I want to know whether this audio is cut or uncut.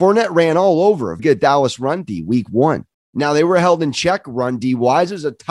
cut